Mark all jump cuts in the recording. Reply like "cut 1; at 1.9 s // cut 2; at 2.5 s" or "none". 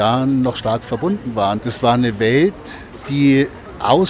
none

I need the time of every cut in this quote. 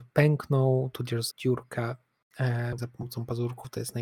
cut 1; at 1.3 s // cut 2; at 2.8 s

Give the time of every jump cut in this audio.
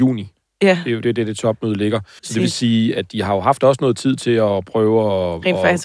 cut 1; at 1.0 s // cut 2; at 2.2 s

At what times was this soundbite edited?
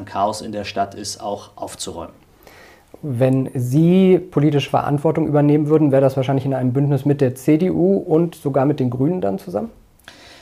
none

